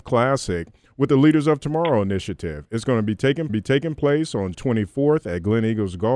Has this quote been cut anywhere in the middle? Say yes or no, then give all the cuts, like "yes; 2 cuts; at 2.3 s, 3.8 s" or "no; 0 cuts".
yes; 2 cuts; at 3.5 s, 4.5 s